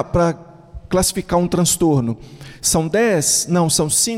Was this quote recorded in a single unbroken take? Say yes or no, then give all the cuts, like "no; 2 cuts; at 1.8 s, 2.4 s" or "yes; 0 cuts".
yes; 0 cuts